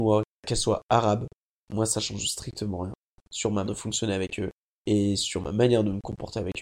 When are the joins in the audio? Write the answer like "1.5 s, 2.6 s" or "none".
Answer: 3.7 s